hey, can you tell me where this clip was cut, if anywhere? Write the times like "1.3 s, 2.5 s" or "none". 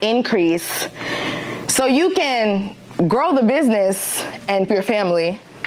4.7 s

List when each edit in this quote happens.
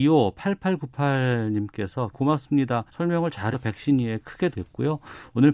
2.1 s, 2.9 s, 3.5 s, 4.5 s

